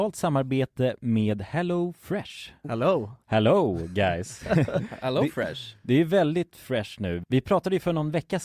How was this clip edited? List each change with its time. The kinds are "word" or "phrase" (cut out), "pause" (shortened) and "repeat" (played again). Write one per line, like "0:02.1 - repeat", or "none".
none